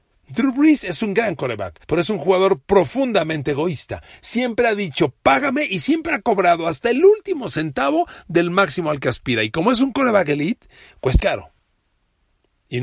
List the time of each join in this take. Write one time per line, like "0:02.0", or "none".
0:01.8
0:11.2